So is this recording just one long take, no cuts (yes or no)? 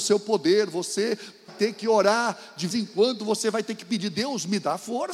no